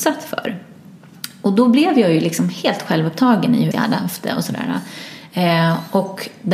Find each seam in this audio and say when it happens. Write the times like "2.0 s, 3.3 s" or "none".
3.7 s